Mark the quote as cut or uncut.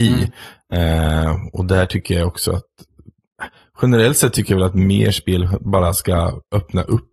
uncut